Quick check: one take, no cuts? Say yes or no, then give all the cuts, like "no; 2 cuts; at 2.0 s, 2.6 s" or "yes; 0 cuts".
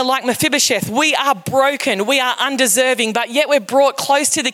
yes; 0 cuts